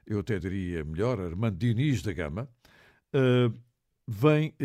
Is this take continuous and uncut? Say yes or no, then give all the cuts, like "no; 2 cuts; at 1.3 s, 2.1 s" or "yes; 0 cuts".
yes; 0 cuts